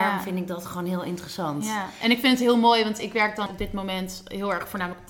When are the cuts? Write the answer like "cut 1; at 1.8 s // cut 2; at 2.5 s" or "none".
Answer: cut 1; at 3.5 s